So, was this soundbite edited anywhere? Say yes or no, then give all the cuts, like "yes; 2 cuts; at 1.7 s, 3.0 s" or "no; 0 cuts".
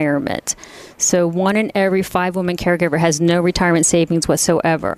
no; 0 cuts